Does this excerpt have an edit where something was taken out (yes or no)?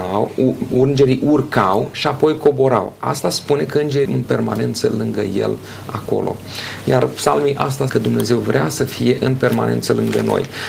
yes